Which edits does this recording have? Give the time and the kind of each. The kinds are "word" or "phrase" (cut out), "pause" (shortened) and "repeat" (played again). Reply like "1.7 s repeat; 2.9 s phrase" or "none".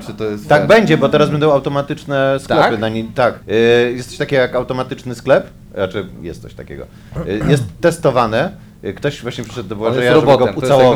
3.4 s pause

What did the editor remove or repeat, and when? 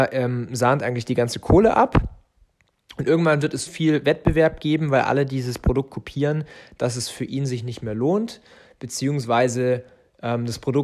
3.7 s word

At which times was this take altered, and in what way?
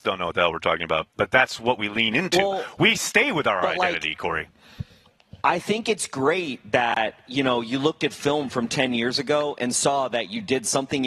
5.4 s pause

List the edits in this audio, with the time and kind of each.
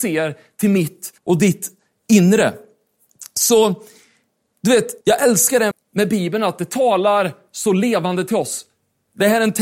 1.2 s pause; 5.0 s pause; 5.7 s word

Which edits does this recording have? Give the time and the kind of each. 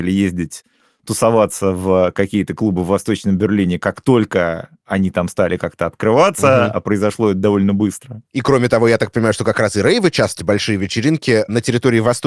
8.3 s pause; 10.4 s phrase

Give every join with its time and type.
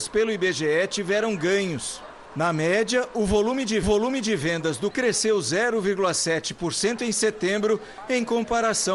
3.8 s repeat; 4.9 s word

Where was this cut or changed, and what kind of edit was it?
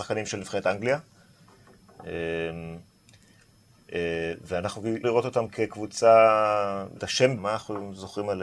5.0 s word; 7.0 s word; 7.4 s word

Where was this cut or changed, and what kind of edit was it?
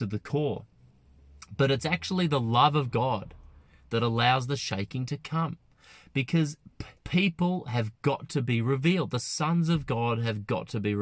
7.0 s pause

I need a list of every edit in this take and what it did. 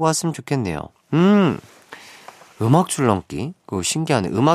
none

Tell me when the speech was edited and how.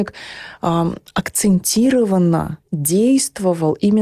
none

